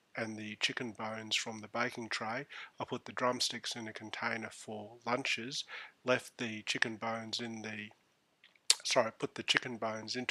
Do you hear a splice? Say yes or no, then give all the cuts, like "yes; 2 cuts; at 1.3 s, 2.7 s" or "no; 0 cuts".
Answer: yes; 1 cut; at 8.8 s